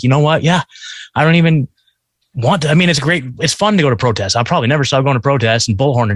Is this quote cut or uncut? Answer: uncut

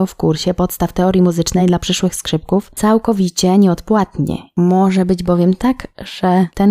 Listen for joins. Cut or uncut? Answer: uncut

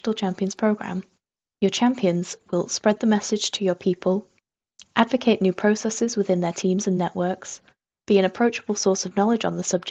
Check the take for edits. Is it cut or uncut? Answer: uncut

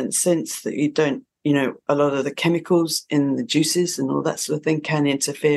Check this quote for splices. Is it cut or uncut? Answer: uncut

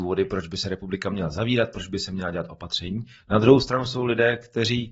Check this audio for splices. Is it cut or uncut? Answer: uncut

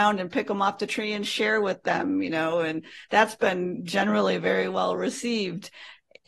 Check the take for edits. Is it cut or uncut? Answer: uncut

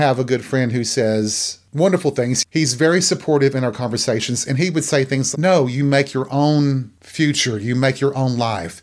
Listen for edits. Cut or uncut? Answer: cut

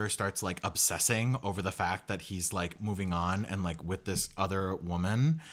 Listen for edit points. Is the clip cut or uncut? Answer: uncut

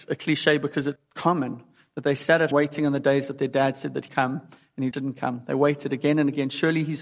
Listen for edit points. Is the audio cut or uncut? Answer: cut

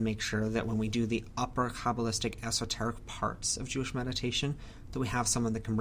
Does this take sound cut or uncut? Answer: uncut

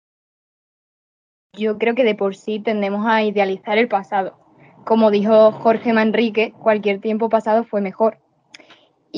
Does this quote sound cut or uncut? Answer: uncut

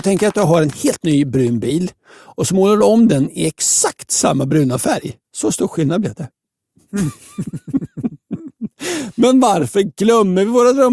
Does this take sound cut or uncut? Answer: cut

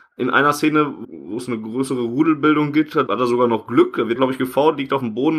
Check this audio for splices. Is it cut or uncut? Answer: cut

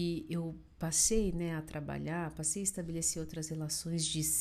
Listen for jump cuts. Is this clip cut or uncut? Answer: uncut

